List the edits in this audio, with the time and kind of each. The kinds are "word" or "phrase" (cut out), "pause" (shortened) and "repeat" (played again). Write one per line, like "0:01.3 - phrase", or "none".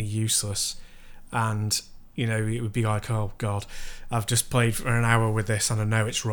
none